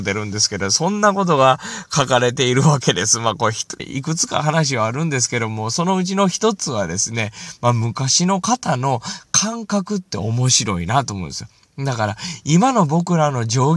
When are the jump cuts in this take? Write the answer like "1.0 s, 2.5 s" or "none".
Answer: 3.8 s